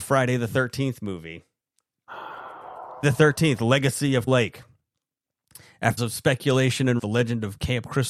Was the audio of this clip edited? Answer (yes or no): yes